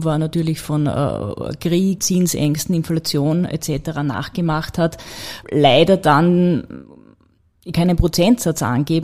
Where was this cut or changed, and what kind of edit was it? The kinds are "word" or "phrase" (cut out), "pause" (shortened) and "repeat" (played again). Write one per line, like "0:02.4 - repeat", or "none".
0:02.0 - word
0:05.4 - word
0:07.7 - word